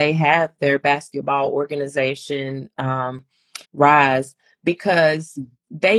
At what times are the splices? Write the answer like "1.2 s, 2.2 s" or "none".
3.6 s